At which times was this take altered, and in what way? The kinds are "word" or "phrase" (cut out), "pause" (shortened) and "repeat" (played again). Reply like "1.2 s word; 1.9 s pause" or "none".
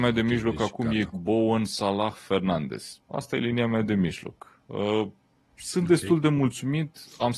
1.1 s phrase; 3.0 s pause